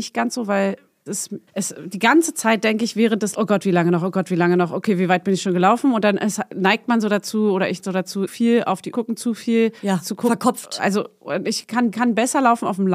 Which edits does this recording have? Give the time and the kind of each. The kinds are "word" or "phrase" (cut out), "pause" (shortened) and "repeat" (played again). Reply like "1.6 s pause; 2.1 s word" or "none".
1.1 s word; 1.5 s pause; 3.3 s word; 7.8 s word; 8.3 s word; 8.9 s phrase; 9.8 s pause; 11.9 s repeat